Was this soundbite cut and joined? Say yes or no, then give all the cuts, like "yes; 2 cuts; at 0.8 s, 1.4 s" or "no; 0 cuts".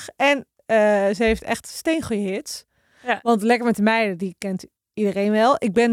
no; 0 cuts